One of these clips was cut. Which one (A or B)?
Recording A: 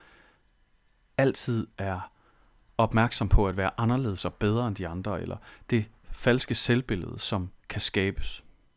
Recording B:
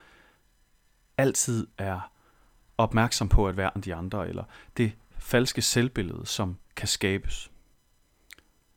B